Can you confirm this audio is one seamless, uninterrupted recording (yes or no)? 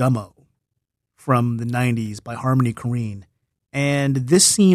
yes